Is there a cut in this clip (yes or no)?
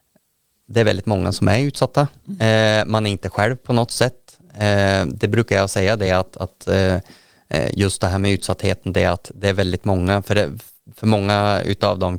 no